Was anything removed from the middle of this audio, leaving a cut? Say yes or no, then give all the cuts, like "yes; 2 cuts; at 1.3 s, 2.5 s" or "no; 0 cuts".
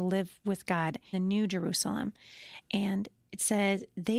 yes; 1 cut; at 1.1 s